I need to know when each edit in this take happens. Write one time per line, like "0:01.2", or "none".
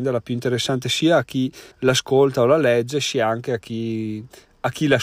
0:01.7